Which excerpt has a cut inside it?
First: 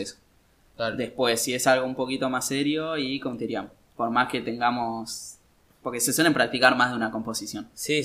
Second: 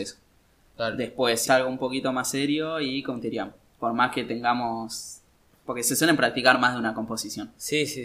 second; 1 cut; at 1.5 s

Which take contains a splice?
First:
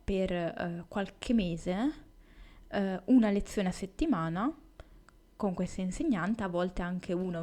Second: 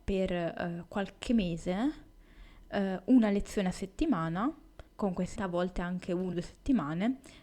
second; 3 cuts; at 4.9 s, 5.4 s, 6.3 s

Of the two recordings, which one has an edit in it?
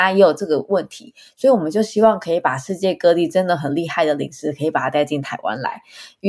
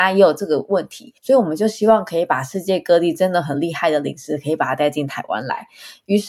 second; 1 cut; at 1.2 s

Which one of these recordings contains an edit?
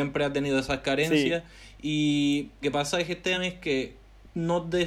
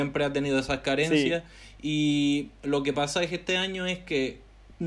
first; 2 cuts; at 2.6 s, 3.3 s

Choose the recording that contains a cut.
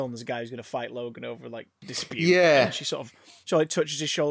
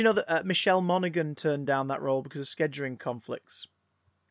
first; 1 cut; at 1.8 s

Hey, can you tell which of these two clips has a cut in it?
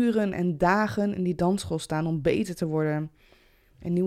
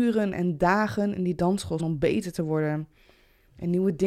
second; 1 cut; at 1.8 s

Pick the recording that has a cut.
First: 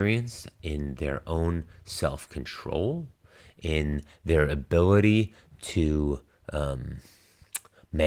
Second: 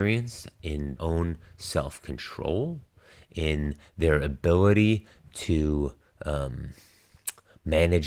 second; 1 cut; at 1.0 s

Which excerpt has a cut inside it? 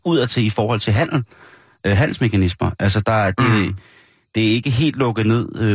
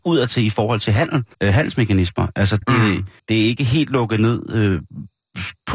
second; 3 cuts; at 1.3 s, 2.6 s, 3.2 s

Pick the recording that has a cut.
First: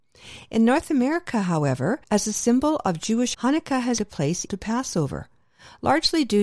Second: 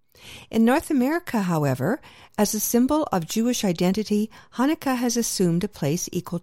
first; 4 cuts; at 2.0 s, 3.3 s, 4.0 s, 4.5 s

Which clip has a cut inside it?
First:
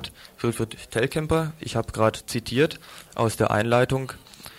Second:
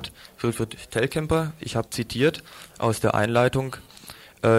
second; 1 cut; at 1.9 s

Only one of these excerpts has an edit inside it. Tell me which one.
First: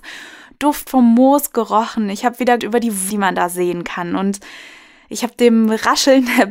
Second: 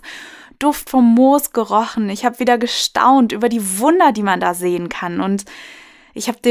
first; 2 cuts; at 2.6 s, 3.1 s

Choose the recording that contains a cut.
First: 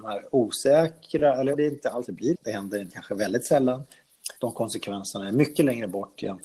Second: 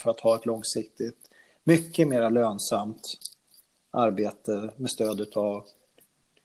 first; 5 cuts; at 1.5 s, 2.0 s, 2.3 s, 2.9 s, 4.4 s

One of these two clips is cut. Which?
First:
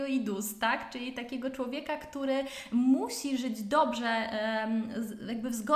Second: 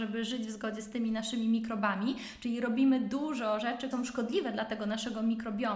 second; 1 cut; at 3.9 s

